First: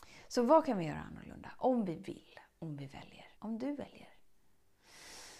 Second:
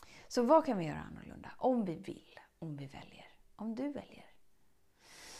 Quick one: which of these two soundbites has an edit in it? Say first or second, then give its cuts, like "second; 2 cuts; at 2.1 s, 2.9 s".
first; 1 cut; at 3.4 s